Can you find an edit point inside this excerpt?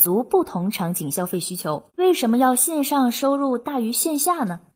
yes; 1 cut; at 1.9 s

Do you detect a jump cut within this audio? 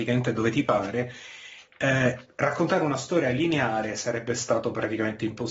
no; 0 cuts

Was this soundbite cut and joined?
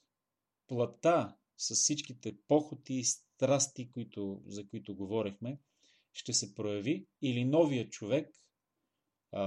yes; 1 cut; at 7.2 s

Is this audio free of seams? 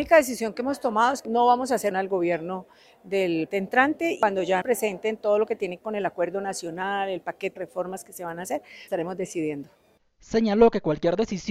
no; 7 cuts; at 1.2 s, 1.9 s, 3.5 s, 4.6 s, 5.8 s, 7.6 s, 8.9 s

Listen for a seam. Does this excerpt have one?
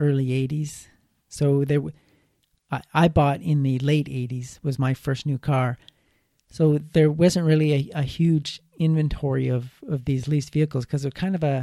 no; 0 cuts

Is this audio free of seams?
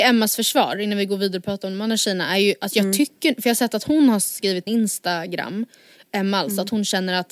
no; 1 cut; at 4.7 s

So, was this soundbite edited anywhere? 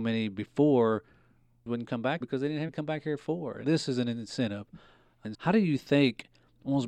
yes; 4 cuts; at 2.2 s, 2.7 s, 3.6 s, 5.3 s

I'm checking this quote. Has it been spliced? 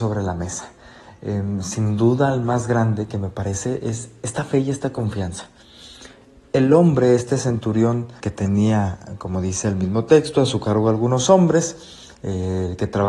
yes; 1 cut; at 8.2 s

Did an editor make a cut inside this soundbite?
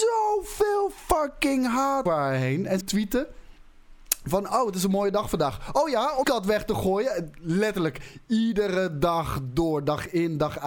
yes; 3 cuts; at 2.1 s, 2.8 s, 6.2 s

